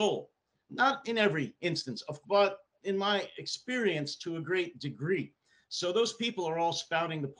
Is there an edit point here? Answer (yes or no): yes